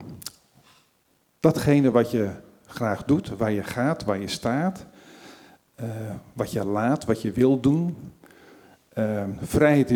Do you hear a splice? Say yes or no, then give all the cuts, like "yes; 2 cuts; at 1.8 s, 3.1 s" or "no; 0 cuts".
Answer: no; 0 cuts